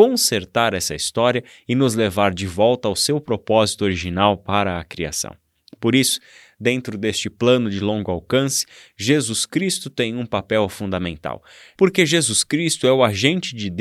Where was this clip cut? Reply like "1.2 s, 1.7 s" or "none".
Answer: none